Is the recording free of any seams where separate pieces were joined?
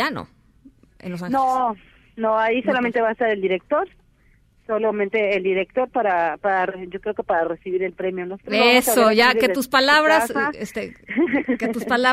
yes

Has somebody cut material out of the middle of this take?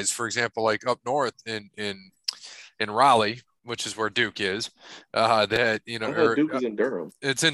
no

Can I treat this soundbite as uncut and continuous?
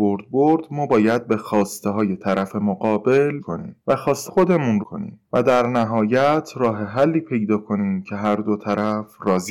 no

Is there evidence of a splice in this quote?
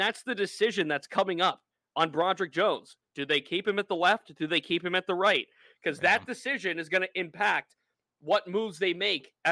no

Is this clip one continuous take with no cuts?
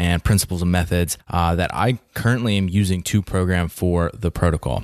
no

